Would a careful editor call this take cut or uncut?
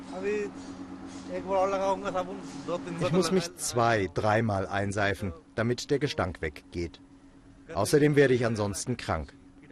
uncut